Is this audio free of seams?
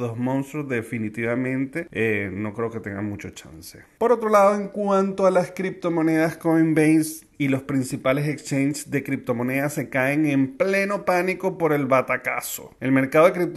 no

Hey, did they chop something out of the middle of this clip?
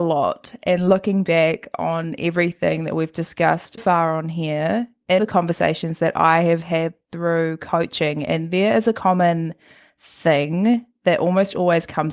yes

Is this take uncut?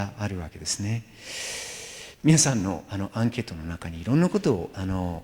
no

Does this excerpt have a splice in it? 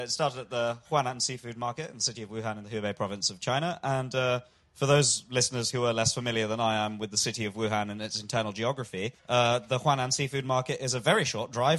yes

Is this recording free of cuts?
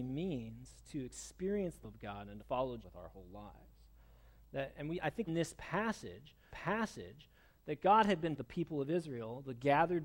no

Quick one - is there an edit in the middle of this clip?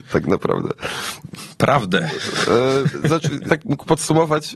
yes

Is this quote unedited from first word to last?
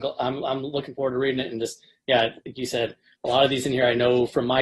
yes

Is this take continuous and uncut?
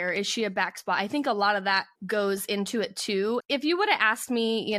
no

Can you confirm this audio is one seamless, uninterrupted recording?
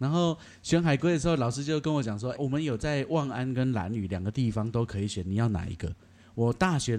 no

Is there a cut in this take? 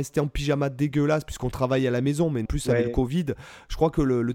yes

